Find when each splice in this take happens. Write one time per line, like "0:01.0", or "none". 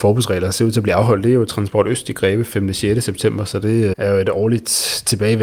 0:03.9